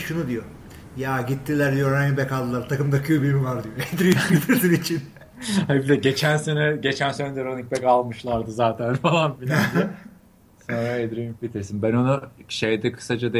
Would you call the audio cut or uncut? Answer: uncut